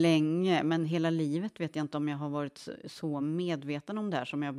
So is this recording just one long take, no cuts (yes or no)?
yes